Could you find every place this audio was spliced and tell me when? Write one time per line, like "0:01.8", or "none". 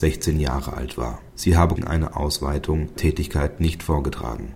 0:01.3
0:01.8
0:03.0